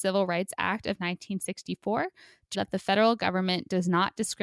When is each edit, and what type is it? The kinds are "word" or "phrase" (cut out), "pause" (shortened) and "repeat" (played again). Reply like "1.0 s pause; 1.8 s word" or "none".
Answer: 2.5 s word